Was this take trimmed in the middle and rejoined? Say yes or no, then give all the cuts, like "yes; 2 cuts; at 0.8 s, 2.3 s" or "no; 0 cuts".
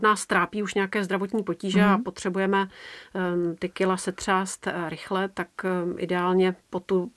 no; 0 cuts